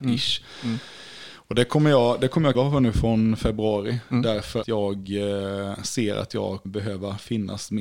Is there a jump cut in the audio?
yes; 3 cuts; at 2.5 s, 4.6 s, 6.6 s

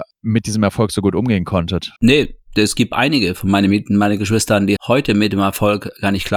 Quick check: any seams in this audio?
yes; 2 cuts; at 2.0 s, 4.8 s

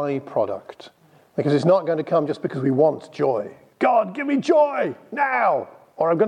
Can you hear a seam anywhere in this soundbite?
yes; 1 cut; at 1.2 s

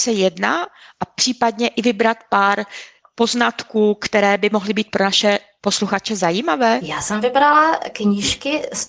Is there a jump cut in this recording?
no; 0 cuts

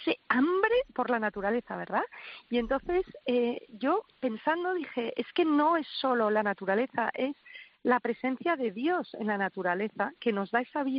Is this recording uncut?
no; 1 cut; at 4.1 s

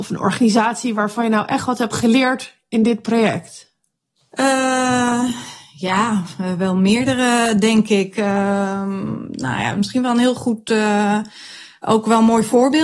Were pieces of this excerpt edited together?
yes; 1 cut; at 4.2 s

